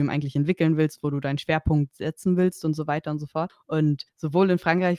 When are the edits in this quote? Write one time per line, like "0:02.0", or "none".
0:04.1